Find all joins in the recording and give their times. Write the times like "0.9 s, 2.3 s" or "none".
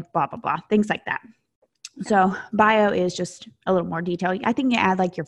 none